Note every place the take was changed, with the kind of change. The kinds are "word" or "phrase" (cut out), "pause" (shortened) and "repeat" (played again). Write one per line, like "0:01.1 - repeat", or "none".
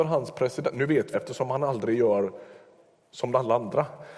0:01.1 - word